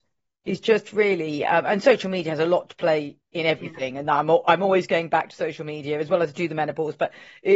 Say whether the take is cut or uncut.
uncut